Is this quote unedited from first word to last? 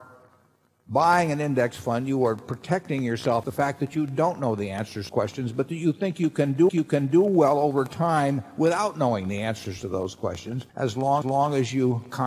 no; 5 cuts; at 3.4 s, 5.1 s, 6.7 s, 10.7 s, 11.2 s

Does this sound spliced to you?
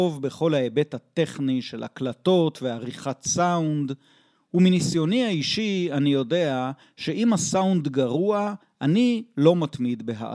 no; 0 cuts

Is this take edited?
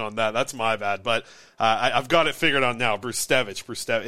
no; 0 cuts

